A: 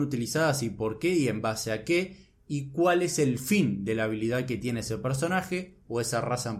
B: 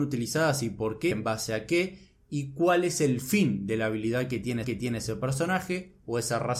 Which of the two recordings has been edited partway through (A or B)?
B